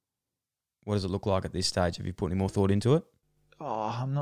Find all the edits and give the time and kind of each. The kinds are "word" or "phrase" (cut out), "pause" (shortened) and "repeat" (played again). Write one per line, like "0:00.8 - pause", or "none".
none